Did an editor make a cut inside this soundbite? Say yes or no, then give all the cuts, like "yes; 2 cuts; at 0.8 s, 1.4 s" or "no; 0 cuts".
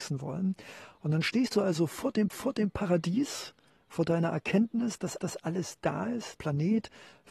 yes; 3 cuts; at 2.3 s, 5.2 s, 6.4 s